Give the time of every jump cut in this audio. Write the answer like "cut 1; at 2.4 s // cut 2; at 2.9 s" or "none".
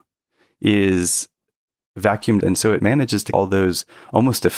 cut 1; at 2.4 s // cut 2; at 3.3 s